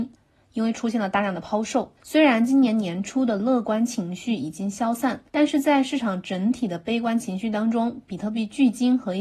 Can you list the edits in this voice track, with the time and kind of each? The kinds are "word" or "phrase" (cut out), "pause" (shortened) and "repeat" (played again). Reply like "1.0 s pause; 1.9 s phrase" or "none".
2.0 s pause; 5.3 s pause

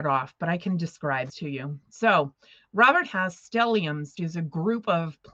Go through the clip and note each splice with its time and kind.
1.3 s word; 4.2 s word

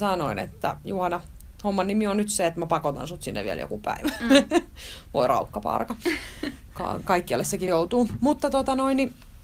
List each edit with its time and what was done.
7.7 s word

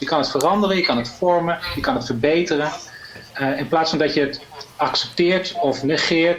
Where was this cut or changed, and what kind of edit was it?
3.3 s pause

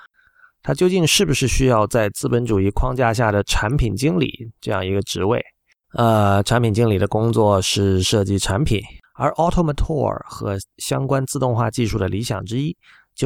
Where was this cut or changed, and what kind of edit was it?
none

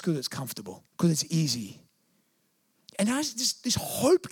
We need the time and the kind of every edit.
0.9 s pause

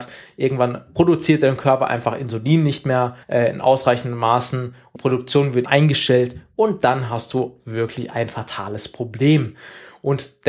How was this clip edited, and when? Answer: 3.2 s pause; 5.0 s word; 5.7 s word

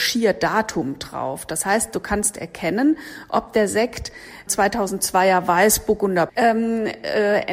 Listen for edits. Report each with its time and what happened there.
4.5 s word; 6.3 s word

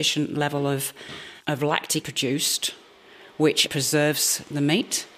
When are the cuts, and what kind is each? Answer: 1.4 s word; 2.0 s word; 3.7 s word

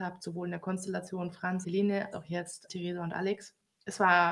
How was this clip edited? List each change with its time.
1.6 s word; 2.1 s word; 2.7 s word

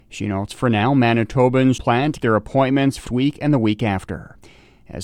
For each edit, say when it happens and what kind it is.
1.8 s word; 2.2 s word; 3.1 s word

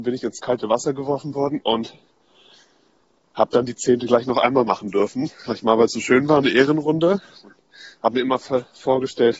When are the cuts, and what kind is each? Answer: none

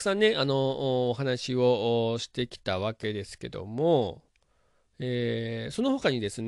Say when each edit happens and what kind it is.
none

